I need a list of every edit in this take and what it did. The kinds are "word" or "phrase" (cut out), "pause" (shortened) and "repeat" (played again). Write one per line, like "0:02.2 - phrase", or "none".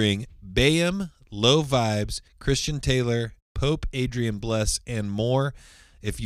0:02.3 - pause
0:03.4 - pause